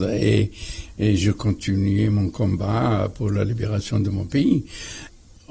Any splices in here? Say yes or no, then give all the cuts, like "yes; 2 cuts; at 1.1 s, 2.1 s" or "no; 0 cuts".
no; 0 cuts